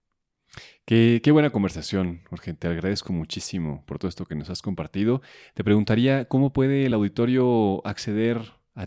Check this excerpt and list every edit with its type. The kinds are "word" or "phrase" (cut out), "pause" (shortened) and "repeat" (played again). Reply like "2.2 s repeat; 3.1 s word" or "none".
none